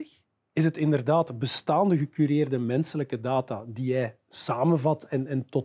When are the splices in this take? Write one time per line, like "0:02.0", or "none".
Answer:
none